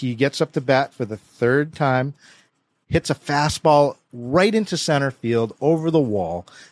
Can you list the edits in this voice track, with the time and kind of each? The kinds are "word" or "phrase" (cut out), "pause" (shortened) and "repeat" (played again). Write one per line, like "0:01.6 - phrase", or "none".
none